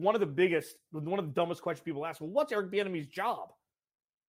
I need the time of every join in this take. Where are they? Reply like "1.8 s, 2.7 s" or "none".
none